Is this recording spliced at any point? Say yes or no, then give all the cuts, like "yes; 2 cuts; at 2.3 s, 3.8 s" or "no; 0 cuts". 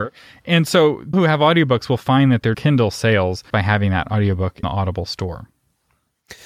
yes; 4 cuts; at 1.1 s, 2.5 s, 3.5 s, 4.6 s